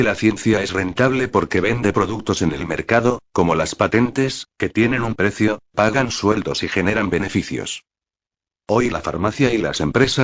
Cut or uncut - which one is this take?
uncut